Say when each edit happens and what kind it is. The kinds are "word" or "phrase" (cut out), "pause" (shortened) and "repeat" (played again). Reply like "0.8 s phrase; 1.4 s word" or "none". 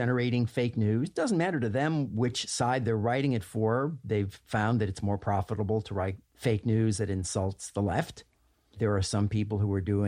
none